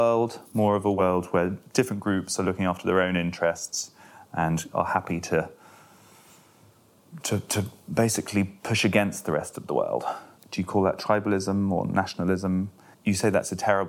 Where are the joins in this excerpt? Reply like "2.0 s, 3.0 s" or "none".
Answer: none